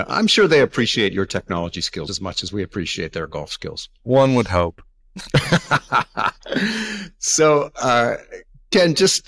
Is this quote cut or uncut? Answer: cut